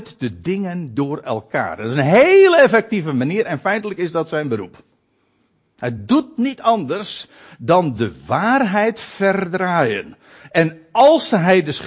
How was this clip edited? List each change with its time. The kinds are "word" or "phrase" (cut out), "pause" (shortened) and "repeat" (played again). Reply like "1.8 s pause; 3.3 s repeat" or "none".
none